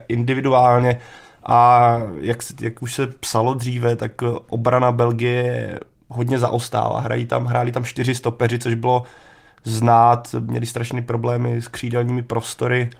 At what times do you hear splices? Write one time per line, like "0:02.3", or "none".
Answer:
none